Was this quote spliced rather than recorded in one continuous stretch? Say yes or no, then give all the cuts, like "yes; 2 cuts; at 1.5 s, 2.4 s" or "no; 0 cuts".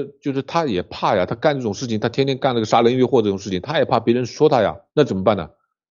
yes; 1 cut; at 4.9 s